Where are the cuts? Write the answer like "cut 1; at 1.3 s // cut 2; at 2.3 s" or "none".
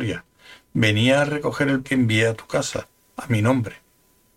cut 1; at 1.8 s